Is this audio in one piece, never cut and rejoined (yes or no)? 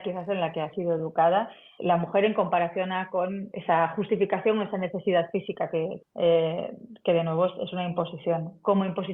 no